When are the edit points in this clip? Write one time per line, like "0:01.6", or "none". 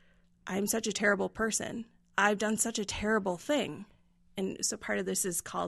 none